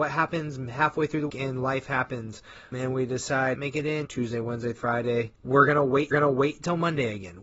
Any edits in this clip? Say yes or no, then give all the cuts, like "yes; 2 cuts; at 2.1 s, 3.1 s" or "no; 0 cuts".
yes; 7 cuts; at 1.3 s, 2.7 s, 3.5 s, 4.0 s, 4.8 s, 5.4 s, 6.1 s